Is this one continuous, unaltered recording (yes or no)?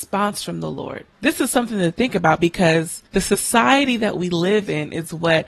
no